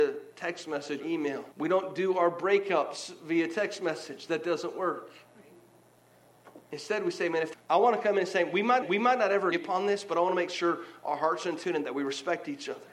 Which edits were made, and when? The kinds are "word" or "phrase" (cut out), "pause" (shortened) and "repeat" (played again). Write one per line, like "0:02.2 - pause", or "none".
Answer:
0:01.0 - word
0:01.5 - pause
0:07.5 - phrase
0:08.8 - repeat
0:09.5 - word